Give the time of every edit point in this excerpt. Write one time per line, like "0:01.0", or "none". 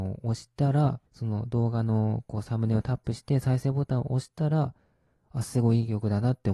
0:01.1